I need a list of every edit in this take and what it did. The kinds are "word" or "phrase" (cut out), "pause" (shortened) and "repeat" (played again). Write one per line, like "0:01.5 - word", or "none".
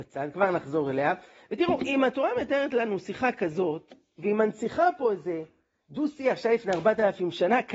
none